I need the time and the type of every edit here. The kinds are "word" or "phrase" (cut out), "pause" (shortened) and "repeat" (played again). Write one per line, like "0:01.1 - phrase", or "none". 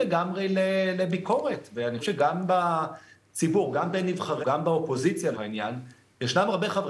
0:02.0 - word
0:04.4 - word
0:05.3 - word